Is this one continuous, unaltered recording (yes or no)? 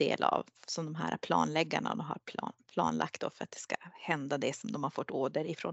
yes